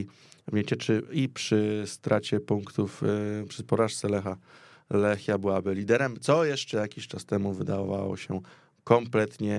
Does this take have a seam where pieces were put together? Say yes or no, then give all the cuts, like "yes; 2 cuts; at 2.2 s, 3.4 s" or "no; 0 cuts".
no; 0 cuts